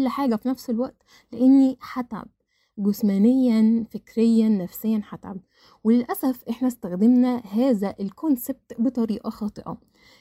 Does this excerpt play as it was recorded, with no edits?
yes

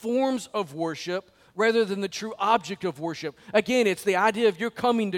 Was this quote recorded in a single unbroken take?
yes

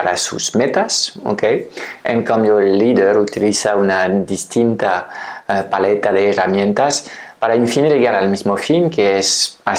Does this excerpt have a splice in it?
no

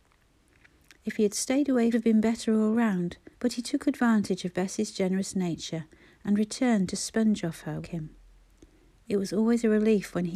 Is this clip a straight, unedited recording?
no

